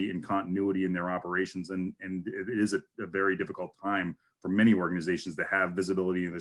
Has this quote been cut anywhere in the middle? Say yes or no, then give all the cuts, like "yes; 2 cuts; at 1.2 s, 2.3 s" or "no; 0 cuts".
no; 0 cuts